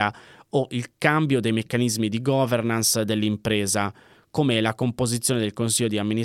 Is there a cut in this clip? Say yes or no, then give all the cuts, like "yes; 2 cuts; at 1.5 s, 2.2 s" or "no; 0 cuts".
no; 0 cuts